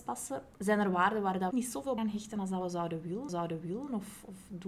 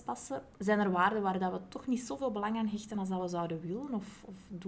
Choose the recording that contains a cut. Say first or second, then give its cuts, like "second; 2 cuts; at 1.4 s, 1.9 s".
first; 3 cuts; at 1.5 s, 2.0 s, 3.3 s